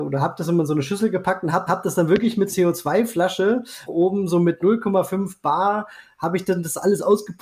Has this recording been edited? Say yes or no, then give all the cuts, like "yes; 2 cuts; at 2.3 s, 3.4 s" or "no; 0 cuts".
yes; 3 cuts; at 1.7 s, 2.5 s, 3.9 s